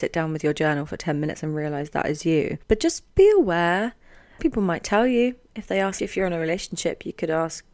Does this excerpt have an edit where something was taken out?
yes; 4 cuts; at 2.6 s, 3.1 s, 4.4 s, 6.0 s

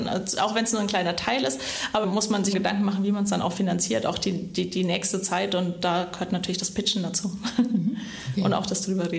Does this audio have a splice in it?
yes; 2 cuts; at 2.0 s, 2.5 s

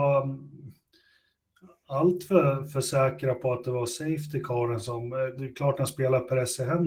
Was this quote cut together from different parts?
no; 0 cuts

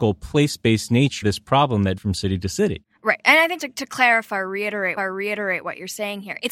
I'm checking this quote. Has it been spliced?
yes; 4 cuts; at 1.2 s, 2.0 s, 3.6 s, 5.0 s

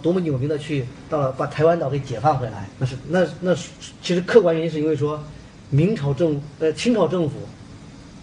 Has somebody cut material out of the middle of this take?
yes; 1 cut; at 2.7 s

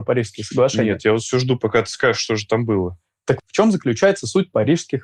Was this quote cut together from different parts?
yes; 1 cut; at 3.4 s

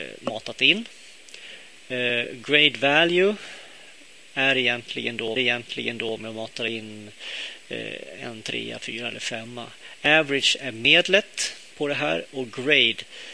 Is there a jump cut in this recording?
yes; 1 cut; at 5.4 s

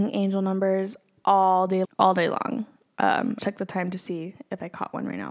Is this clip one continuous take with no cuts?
no; 2 cuts; at 1.8 s, 3.4 s

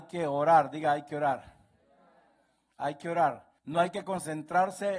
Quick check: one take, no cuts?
no; 1 cut; at 3.6 s

